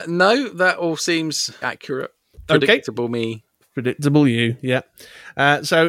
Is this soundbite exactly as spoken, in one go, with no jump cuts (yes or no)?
no